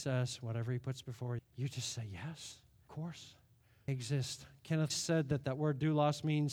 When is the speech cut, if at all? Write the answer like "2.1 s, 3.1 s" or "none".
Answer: 1.4 s, 2.9 s, 3.9 s, 4.9 s